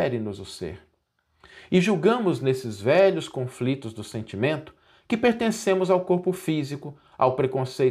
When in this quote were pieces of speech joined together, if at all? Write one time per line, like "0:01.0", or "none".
none